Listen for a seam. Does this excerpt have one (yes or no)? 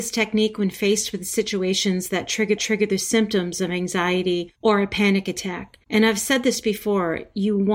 yes